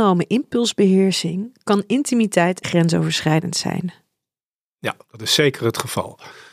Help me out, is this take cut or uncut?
cut